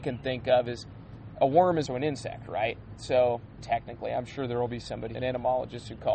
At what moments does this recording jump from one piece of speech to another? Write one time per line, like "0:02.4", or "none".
0:01.9
0:03.6
0:05.1

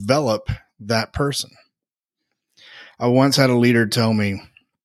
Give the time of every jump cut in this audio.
none

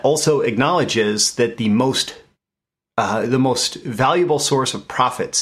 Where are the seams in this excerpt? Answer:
none

